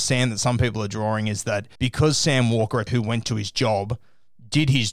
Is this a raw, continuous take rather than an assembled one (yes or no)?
no